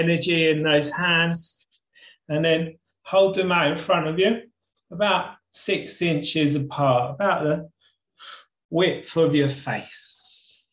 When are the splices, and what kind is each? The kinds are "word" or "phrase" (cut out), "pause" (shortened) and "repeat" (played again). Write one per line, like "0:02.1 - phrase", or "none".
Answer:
none